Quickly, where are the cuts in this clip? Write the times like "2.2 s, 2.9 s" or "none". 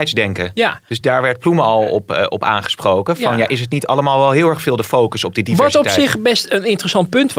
none